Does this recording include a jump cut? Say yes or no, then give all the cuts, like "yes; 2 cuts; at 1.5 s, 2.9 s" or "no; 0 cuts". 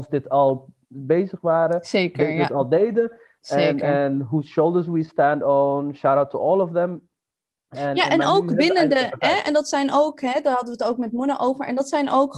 no; 0 cuts